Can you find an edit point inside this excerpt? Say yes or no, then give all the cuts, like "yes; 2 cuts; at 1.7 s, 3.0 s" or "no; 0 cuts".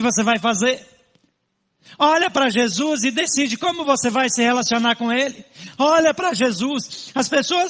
no; 0 cuts